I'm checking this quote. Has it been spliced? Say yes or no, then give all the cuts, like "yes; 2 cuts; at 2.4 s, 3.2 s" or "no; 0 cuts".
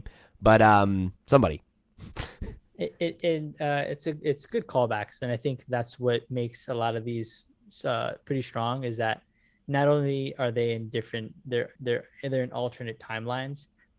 yes; 2 cuts; at 1.2 s, 11.8 s